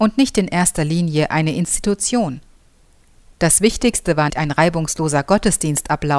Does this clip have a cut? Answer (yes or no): yes